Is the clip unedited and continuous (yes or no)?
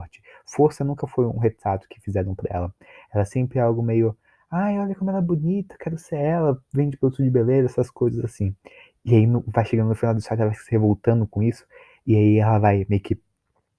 yes